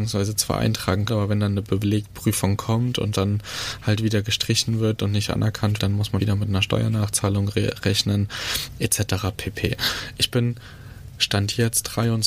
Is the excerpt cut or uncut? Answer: cut